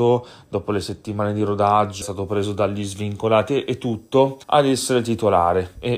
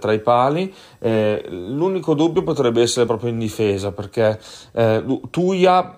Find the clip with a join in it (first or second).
first